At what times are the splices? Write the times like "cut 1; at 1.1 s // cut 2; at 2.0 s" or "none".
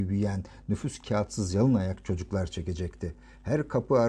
none